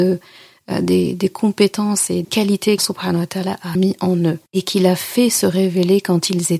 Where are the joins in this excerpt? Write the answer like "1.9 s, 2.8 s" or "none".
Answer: 2.2 s, 2.8 s, 3.7 s, 4.5 s